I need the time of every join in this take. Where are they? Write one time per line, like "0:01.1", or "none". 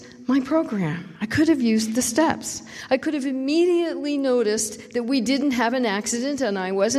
none